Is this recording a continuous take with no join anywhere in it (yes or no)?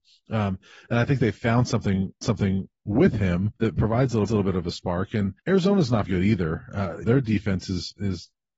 no